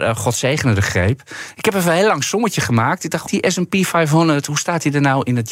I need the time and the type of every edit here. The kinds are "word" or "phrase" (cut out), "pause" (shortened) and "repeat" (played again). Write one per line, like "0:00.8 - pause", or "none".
0:03.3 - word